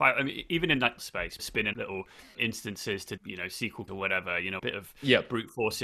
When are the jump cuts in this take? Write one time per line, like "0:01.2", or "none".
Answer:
0:01.0
0:01.4
0:01.7
0:02.3
0:03.2
0:03.9
0:04.6